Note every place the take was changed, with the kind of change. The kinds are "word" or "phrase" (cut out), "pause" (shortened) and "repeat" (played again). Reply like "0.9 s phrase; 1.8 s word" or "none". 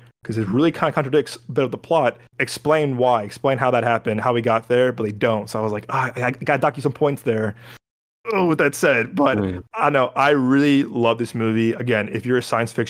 2.3 s pause; 9.7 s pause

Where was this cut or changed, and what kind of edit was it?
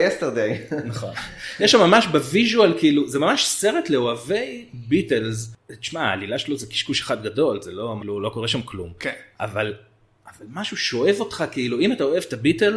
8.0 s word

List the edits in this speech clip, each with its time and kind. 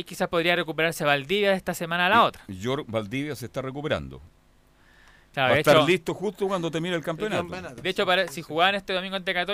none

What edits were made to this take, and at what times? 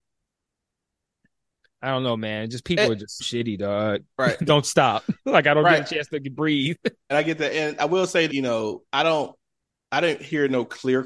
3.2 s word; 4.5 s word; 7.1 s word; 8.3 s word; 8.9 s word

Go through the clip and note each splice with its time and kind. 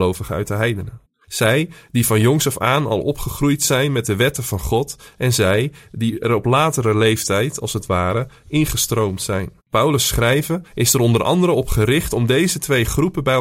1.0 s pause; 9.6 s pause; 10.7 s pause

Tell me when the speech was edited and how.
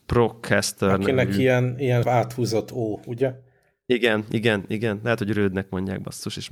2.0 s word

